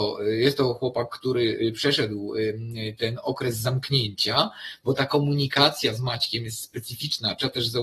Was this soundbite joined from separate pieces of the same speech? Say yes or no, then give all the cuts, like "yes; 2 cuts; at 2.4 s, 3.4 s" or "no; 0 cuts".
no; 0 cuts